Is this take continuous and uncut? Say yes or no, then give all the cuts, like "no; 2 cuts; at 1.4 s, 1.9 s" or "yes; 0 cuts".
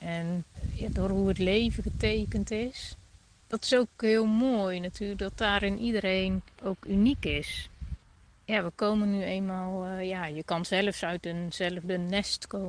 no; 1 cut; at 6.5 s